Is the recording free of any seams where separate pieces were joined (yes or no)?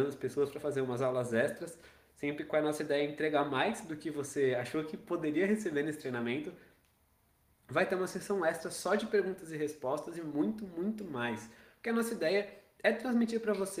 yes